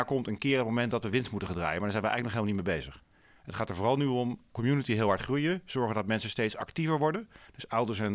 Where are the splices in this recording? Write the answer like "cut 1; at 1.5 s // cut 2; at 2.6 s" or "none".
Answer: none